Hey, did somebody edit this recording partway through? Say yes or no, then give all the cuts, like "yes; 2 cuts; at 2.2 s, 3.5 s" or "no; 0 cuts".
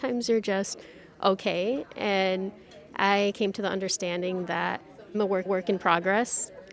yes; 3 cuts; at 3.3 s, 5.1 s, 5.5 s